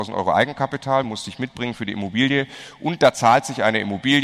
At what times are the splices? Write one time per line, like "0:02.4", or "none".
none